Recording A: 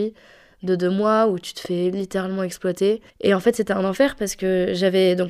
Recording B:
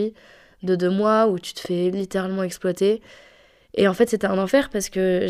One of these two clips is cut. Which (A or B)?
A